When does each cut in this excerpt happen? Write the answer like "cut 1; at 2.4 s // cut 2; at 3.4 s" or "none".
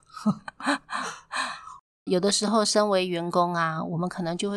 cut 1; at 2.1 s